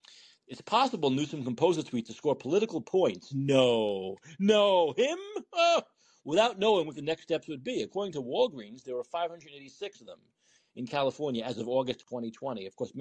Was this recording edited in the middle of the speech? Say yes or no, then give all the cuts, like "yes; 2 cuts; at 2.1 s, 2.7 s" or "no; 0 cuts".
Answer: no; 0 cuts